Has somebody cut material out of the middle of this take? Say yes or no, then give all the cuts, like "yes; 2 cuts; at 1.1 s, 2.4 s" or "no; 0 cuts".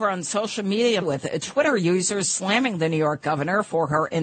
yes; 1 cut; at 1.0 s